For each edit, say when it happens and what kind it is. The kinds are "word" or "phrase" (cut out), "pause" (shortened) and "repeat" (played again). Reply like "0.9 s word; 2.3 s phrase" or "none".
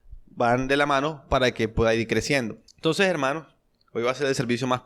2.7 s pause